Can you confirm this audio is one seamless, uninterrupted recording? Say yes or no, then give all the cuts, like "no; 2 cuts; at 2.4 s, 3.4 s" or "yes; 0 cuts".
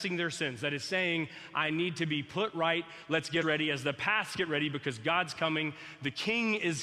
no; 1 cut; at 3.4 s